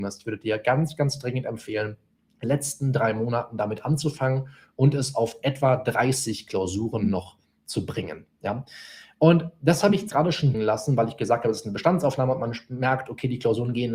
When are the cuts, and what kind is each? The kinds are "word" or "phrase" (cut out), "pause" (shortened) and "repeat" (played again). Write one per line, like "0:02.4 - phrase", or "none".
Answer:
0:02.4 - word
0:10.1 - word
0:10.5 - word